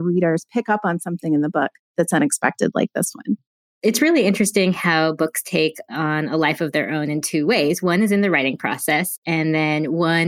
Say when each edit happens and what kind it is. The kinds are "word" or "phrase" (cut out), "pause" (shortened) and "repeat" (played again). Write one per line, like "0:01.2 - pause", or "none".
none